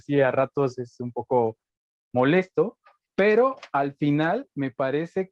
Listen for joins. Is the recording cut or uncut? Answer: uncut